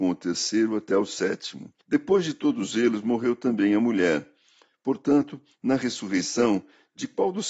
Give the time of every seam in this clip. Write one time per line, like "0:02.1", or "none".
0:01.8